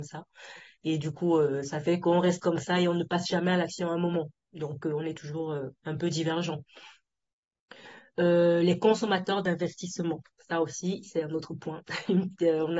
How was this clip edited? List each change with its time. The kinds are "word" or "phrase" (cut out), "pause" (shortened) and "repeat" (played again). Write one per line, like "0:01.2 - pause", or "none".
0:05.8 - pause